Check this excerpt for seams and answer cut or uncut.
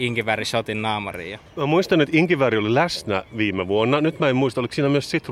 cut